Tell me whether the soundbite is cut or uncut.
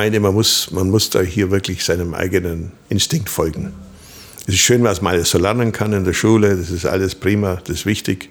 cut